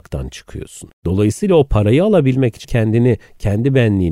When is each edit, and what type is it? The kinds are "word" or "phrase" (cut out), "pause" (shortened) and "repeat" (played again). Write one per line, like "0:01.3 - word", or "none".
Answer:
0:00.9 - pause
0:02.6 - word